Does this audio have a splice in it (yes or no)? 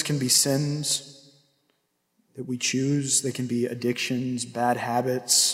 no